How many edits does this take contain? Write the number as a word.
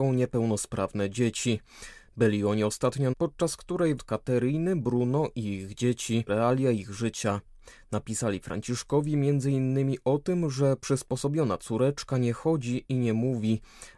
three